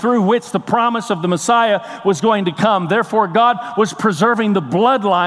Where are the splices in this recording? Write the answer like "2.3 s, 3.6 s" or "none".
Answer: none